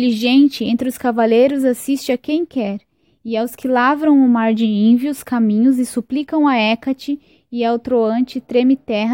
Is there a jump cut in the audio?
no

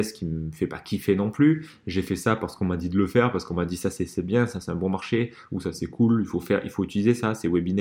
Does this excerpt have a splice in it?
no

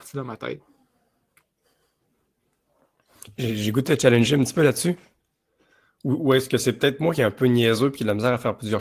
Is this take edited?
no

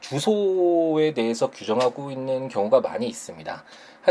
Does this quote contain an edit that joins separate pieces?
no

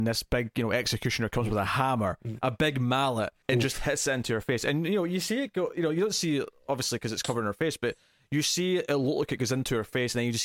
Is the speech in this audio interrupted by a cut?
yes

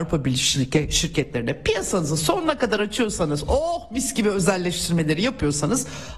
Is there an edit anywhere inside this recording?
no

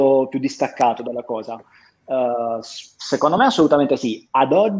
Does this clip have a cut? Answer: no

